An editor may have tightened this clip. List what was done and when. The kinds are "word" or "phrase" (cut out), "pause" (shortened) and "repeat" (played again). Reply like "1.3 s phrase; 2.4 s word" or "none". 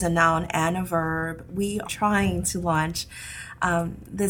1.8 s word